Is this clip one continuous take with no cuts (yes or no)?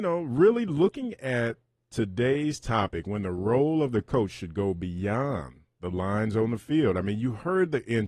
yes